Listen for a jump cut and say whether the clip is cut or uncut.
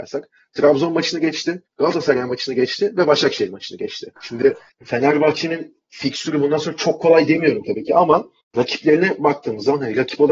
cut